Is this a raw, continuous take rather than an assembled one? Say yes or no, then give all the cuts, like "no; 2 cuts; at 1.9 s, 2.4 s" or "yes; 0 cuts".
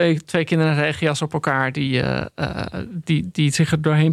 yes; 0 cuts